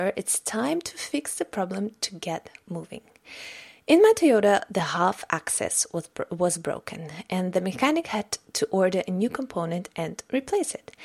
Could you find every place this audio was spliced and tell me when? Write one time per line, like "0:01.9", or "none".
none